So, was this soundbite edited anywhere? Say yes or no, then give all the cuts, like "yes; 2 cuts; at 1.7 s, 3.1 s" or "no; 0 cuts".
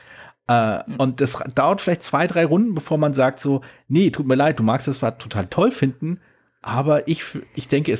no; 0 cuts